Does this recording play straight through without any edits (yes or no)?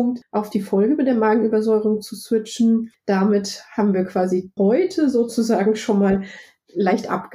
no